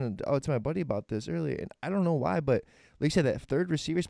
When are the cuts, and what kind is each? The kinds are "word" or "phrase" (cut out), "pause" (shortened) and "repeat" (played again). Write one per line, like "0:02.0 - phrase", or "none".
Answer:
none